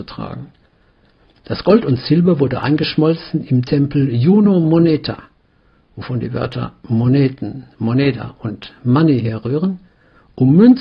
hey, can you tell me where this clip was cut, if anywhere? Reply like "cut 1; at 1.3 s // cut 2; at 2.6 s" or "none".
none